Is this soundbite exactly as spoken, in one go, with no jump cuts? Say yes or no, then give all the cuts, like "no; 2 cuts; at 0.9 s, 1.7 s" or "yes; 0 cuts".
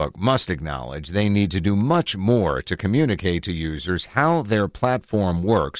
yes; 0 cuts